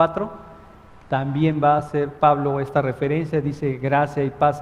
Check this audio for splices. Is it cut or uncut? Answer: uncut